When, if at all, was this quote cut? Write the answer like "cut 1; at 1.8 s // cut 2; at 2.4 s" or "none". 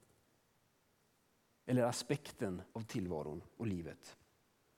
cut 1; at 2.7 s